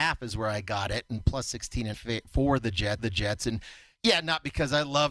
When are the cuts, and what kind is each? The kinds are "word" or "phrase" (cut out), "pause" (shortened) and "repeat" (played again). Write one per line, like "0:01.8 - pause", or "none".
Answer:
0:01.9 - phrase
0:03.0 - repeat